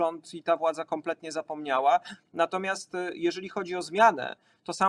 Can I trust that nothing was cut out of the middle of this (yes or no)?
yes